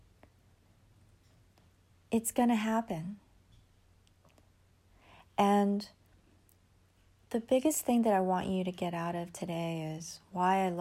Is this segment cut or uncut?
uncut